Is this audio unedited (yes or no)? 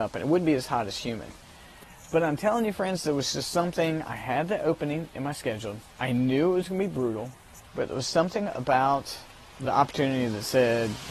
no